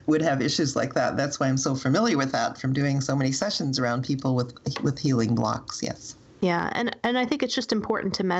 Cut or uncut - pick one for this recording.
cut